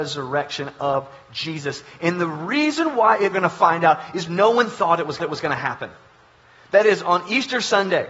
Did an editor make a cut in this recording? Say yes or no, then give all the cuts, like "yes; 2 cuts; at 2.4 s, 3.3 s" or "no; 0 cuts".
yes; 3 cuts; at 3.3 s, 4.3 s, 5.2 s